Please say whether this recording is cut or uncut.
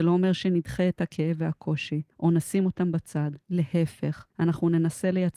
cut